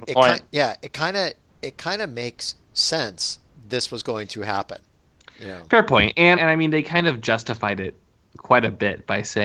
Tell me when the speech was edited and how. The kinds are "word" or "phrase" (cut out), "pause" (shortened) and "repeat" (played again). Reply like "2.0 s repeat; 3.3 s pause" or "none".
5.2 s pause; 6.4 s word